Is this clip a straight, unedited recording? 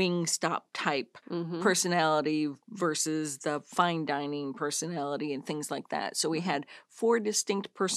no; 1 cut; at 1.2 s

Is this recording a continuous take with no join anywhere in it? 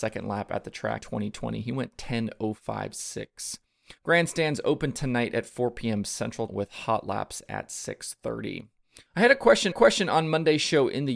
no; 5 cuts; at 1.0 s, 4.0 s, 6.5 s, 9.1 s, 9.7 s

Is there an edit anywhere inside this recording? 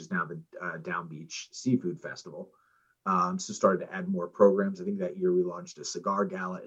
no; 0 cuts

